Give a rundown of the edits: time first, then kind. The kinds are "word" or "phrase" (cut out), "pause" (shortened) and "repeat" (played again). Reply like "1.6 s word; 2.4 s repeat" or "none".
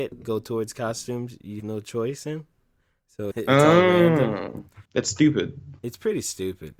1.6 s word; 3.3 s word; 4.8 s pause; 5.8 s pause